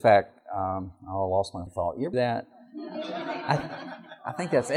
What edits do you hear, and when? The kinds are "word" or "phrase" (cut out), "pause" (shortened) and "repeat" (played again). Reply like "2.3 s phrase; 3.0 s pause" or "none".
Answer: 1.7 s word; 2.1 s word